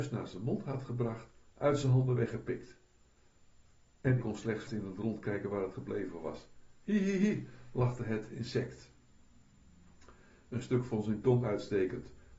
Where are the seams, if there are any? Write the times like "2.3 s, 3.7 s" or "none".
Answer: 4.2 s, 4.7 s